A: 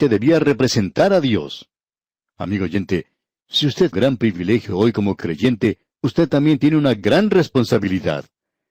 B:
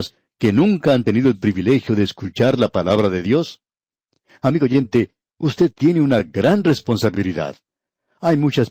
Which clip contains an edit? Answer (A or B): A